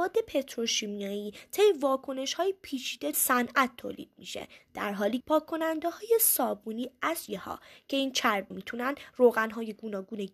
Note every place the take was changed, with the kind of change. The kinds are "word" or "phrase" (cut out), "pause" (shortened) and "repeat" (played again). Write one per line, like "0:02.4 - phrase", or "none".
0:03.1 - word
0:05.2 - word
0:07.3 - word
0:08.5 - word